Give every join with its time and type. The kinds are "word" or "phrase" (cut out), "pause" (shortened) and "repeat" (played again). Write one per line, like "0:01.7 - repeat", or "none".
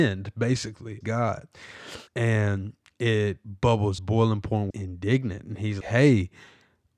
0:01.0 - word
0:02.1 - pause
0:04.0 - phrase
0:04.7 - phrase
0:05.8 - word